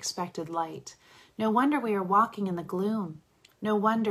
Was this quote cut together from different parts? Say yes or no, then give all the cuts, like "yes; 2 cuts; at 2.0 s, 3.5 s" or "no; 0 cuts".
no; 0 cuts